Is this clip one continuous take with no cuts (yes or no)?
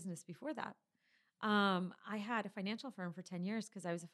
yes